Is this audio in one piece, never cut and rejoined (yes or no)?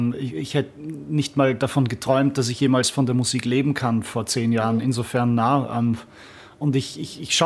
yes